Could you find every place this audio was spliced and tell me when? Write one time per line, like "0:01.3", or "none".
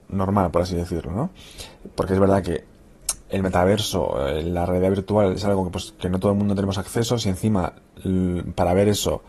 none